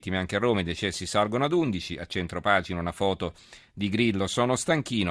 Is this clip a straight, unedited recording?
yes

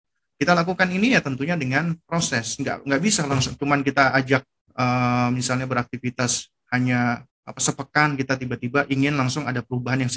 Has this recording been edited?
yes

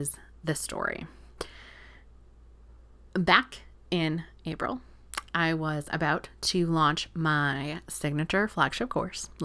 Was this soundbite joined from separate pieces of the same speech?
no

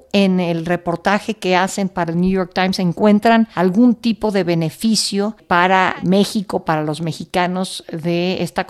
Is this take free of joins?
yes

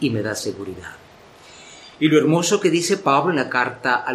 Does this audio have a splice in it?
no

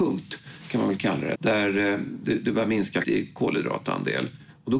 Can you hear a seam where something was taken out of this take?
yes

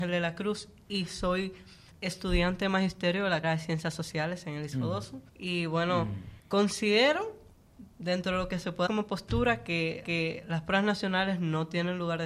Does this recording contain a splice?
yes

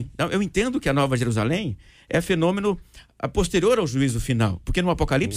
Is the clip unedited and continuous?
yes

